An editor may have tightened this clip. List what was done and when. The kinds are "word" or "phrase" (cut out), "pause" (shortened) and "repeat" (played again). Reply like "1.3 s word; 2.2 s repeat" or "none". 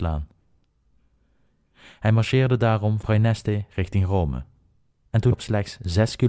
3.0 s word; 5.3 s word